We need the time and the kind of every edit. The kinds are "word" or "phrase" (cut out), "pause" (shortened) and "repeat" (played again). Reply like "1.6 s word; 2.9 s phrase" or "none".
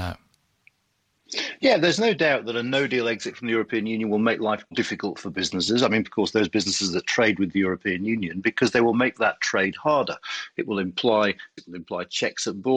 4.7 s word; 6.0 s word; 11.6 s word